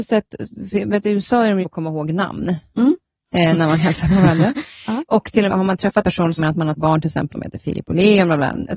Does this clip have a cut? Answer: yes; 6 cuts; at 1.6 s, 5.5 s, 6.0 s, 6.4 s, 6.8 s, 7.3 s

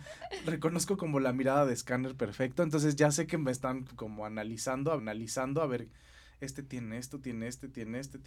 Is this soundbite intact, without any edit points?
no; 2 cuts; at 3.9 s, 5.0 s

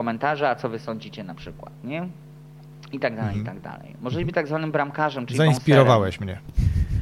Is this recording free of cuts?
yes; 0 cuts

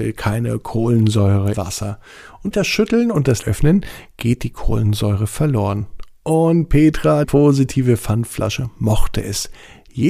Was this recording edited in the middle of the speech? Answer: yes; 4 cuts; at 1.5 s, 2.5 s, 3.4 s, 7.2 s

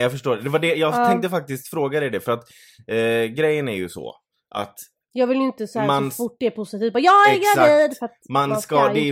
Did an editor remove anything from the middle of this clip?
no; 0 cuts

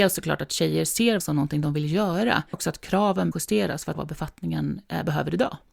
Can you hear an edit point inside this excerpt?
yes; 4 cuts; at 1.2 s, 2.5 s, 3.3 s, 3.9 s

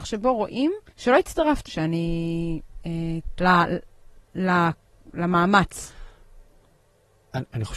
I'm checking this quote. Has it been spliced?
yes; 4 cuts; at 0.9 s, 1.7 s, 3.4 s, 4.2 s

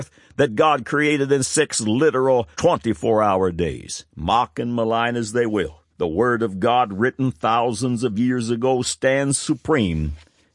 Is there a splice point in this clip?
yes; 3 cuts; at 2.5 s, 4.1 s, 5.9 s

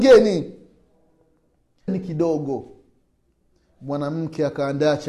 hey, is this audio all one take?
no; 1 cut; at 1.9 s

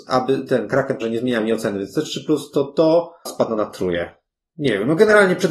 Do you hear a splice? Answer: yes; 2 cuts; at 1.0 s, 3.3 s

